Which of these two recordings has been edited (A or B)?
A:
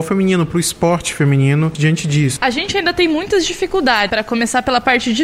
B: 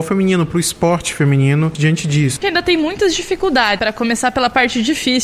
B